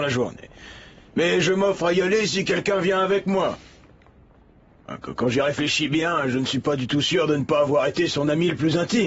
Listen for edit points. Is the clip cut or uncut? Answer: uncut